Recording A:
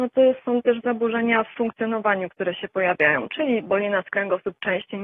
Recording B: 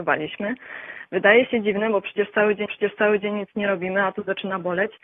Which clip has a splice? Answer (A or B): B